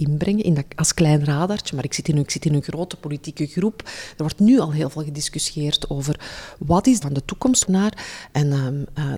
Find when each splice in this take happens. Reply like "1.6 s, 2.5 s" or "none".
2.3 s, 7.0 s, 7.6 s